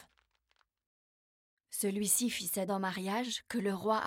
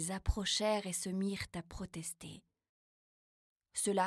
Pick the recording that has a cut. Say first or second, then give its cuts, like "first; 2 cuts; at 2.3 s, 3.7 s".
first; 1 cut; at 2.7 s